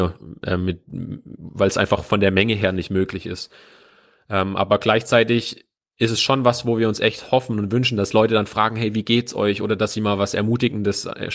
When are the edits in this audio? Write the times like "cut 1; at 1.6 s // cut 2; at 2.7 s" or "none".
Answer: none